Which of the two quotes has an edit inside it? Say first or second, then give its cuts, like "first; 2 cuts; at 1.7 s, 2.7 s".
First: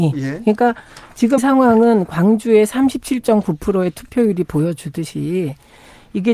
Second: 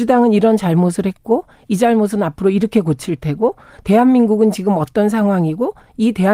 first; 1 cut; at 1.4 s